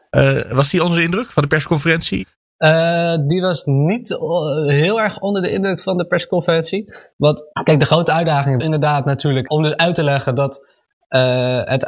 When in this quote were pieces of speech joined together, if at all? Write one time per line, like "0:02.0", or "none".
0:07.5
0:08.6